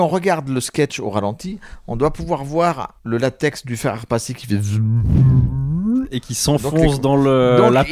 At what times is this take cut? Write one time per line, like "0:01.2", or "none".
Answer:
0:03.0